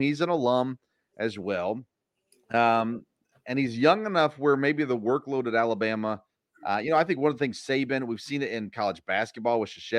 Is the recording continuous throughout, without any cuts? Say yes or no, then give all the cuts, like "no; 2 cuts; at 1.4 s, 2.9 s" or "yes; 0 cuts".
yes; 0 cuts